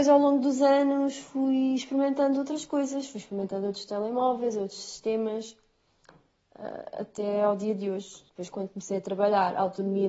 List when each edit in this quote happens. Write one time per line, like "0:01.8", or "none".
0:08.3